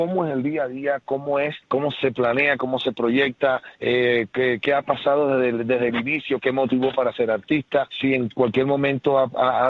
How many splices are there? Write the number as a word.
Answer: one